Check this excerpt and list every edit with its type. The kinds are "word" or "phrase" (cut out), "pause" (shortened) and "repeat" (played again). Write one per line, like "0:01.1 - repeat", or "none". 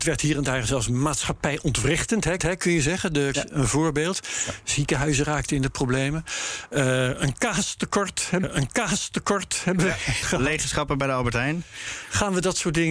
0:02.4 - repeat
0:03.3 - phrase
0:08.4 - repeat
0:10.2 - word